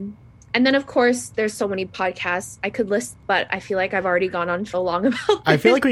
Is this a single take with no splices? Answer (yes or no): no